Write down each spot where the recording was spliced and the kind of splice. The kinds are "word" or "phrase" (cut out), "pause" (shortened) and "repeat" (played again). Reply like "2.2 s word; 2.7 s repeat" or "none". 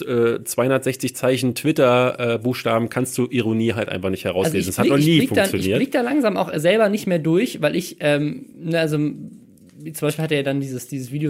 none

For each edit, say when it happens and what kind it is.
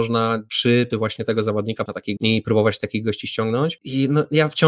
0.9 s word; 1.9 s word; 2.2 s phrase

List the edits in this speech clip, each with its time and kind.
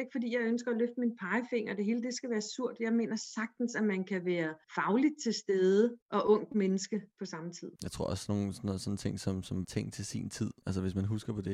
4.6 s pause; 6.0 s pause; 7.8 s pause; 9.6 s word

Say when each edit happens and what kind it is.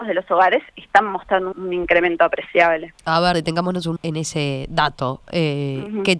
1.5 s word; 3.0 s pause; 3.3 s word; 4.0 s phrase

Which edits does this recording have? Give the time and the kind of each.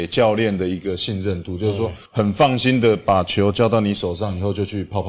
2.1 s pause

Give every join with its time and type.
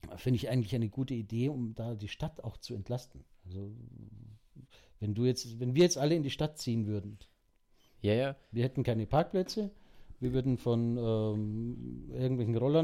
3.3 s pause; 8.4 s pause

